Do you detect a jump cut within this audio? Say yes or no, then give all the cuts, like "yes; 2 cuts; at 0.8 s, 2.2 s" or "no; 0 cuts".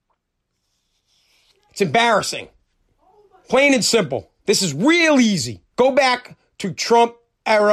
yes; 3 cuts; at 2.7 s, 4.4 s, 5.7 s